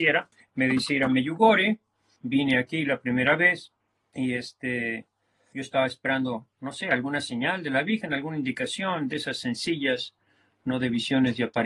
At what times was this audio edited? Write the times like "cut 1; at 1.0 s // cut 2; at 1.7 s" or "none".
none